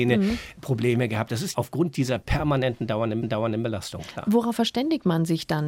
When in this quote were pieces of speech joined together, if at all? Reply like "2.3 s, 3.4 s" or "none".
1.5 s, 3.2 s